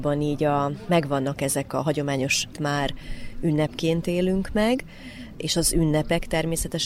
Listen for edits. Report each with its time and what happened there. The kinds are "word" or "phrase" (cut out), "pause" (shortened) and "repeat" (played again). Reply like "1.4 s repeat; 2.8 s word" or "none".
2.5 s phrase